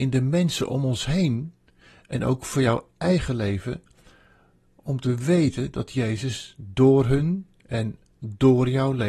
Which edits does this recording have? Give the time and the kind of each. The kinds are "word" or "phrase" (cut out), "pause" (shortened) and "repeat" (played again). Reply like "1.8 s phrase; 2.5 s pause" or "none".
none